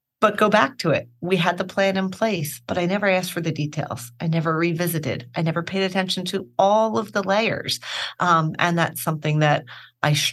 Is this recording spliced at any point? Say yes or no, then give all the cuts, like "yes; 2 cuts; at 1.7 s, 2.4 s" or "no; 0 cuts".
no; 0 cuts